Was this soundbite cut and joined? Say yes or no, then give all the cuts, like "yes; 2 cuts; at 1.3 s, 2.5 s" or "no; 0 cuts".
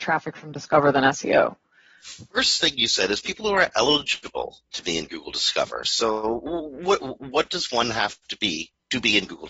no; 0 cuts